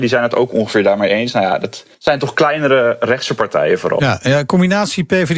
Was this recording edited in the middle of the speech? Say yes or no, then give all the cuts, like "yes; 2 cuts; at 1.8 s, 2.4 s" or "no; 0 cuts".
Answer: yes; 1 cut; at 1.9 s